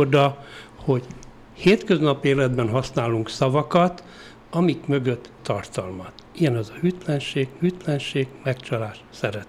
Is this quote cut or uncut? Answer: cut